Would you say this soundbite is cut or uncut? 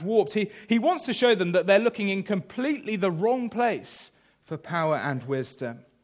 uncut